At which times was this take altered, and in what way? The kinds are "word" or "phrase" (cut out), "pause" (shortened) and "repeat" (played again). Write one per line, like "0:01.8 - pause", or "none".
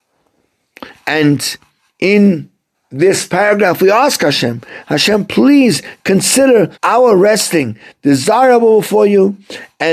0:02.7 - pause
0:06.7 - pause